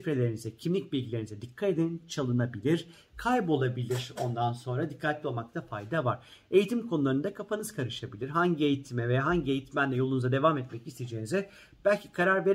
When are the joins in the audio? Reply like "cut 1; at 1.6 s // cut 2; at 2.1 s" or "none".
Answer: none